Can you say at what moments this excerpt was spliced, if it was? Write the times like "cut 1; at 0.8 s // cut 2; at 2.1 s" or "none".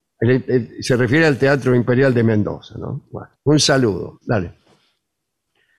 cut 1; at 3.4 s